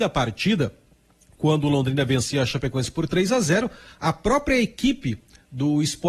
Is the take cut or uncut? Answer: uncut